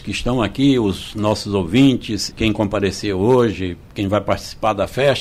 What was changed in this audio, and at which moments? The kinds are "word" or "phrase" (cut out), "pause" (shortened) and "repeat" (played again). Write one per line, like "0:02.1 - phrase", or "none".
0:02.3 - word